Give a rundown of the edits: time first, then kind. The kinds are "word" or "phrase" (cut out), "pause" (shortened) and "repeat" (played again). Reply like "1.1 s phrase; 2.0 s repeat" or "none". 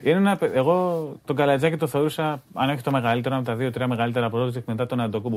none